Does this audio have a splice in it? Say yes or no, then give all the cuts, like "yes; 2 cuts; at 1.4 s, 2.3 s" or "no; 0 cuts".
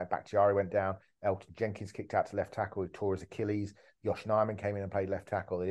no; 0 cuts